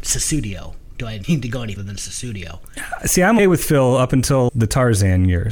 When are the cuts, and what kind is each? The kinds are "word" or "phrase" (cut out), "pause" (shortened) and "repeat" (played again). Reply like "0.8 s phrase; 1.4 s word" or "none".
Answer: 1.2 s word; 1.8 s word; 3.4 s word; 4.5 s word

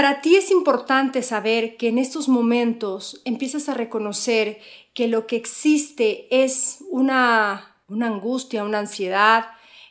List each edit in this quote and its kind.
7.8 s pause

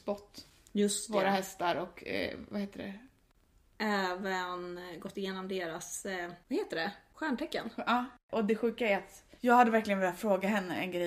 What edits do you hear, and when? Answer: none

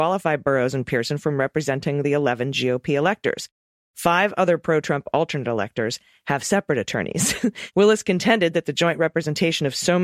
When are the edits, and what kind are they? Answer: none

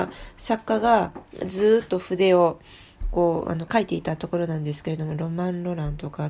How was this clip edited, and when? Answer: 3.7 s word

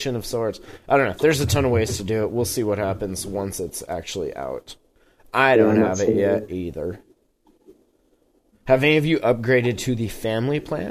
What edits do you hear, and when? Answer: none

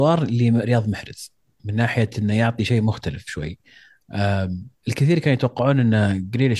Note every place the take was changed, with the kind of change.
none

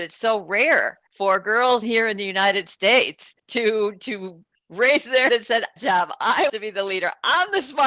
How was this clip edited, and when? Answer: 1.1 s pause; 1.8 s word; 3.4 s pause; 4.5 s pause; 5.3 s word; 5.8 s phrase; 6.5 s word

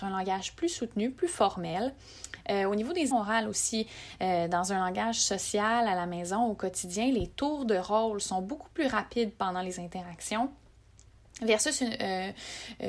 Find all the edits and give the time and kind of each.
3.1 s word

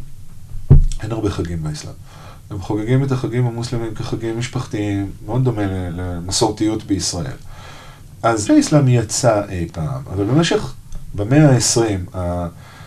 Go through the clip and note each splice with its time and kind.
8.5 s phrase

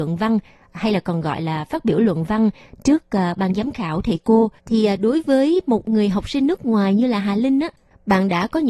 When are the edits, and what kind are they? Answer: 4.6 s pause

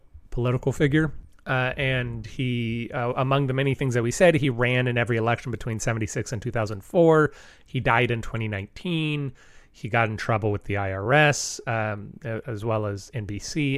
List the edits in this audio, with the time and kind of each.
none

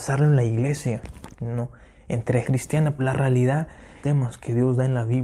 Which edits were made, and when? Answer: 2.4 s word; 3.0 s word; 4.0 s phrase

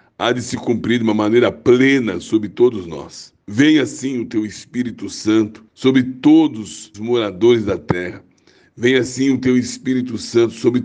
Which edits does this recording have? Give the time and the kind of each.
3.4 s pause; 5.7 s pause; 6.9 s phrase

